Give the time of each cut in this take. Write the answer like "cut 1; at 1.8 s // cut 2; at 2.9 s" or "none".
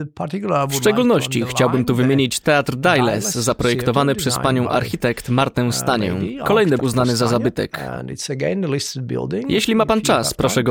cut 1; at 6.8 s